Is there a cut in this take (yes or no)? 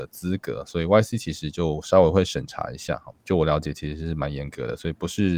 yes